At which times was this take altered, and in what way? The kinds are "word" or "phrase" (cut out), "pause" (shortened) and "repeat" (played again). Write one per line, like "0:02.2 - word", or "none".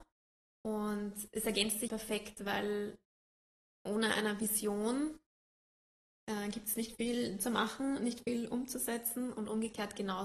0:01.9 - word